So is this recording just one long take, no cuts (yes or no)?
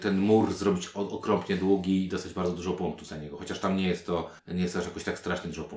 no